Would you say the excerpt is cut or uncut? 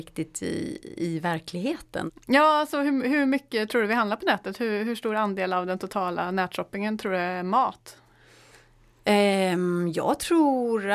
uncut